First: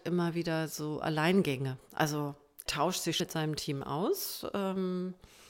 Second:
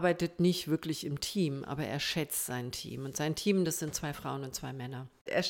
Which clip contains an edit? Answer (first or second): first